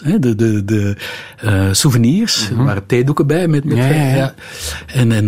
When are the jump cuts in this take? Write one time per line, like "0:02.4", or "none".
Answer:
none